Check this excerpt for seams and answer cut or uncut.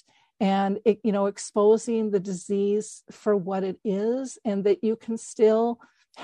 uncut